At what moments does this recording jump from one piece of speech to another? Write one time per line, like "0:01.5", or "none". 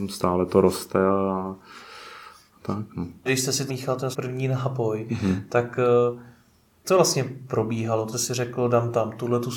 0:02.6
0:03.3
0:03.7
0:04.1
0:06.8
0:08.1